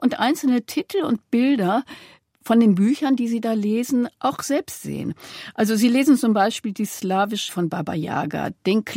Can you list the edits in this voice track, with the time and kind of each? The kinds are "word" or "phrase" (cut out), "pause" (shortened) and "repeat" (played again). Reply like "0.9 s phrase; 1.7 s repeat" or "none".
7.5 s word